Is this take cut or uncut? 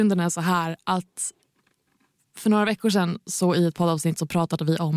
uncut